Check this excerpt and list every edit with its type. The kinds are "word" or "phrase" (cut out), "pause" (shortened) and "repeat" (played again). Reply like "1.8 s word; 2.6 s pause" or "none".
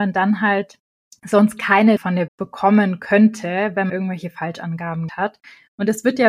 0.9 s pause; 2.0 s word; 2.3 s word; 3.9 s word; 5.1 s word